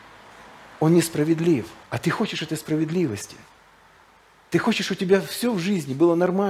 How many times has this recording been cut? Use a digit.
1